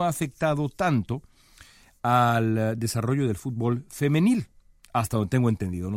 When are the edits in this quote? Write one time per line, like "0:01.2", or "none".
none